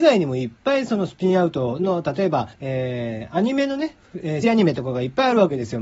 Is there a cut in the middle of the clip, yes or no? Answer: yes